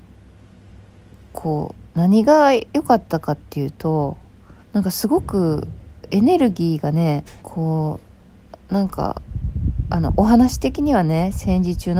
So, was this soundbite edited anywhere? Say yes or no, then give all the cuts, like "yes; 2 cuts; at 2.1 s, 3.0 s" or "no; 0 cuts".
yes; 2 cuts; at 4.6 s, 7.4 s